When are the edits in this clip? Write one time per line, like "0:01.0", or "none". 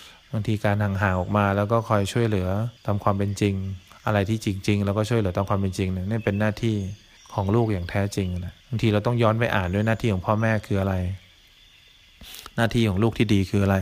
0:02.8
0:03.9
0:07.2
0:08.6